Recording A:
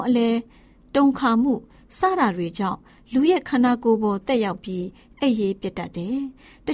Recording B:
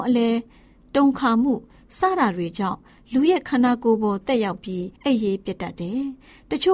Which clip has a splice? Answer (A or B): B